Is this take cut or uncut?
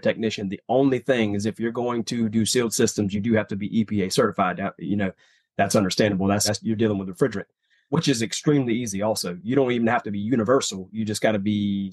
uncut